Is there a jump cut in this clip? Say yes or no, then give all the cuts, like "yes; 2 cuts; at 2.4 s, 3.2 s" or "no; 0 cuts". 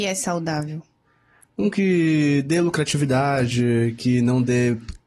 no; 0 cuts